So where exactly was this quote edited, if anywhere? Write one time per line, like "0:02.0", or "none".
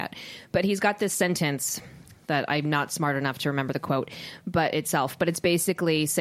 none